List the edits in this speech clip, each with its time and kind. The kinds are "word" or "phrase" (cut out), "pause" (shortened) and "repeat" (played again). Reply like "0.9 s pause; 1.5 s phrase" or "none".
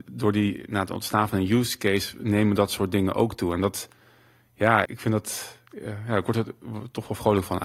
4.9 s word